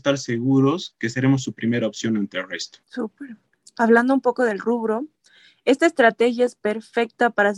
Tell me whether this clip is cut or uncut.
cut